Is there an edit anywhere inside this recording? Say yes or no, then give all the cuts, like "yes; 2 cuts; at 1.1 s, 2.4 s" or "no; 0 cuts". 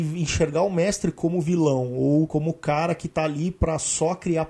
no; 0 cuts